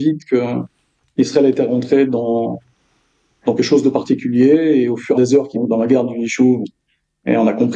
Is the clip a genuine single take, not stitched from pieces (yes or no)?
no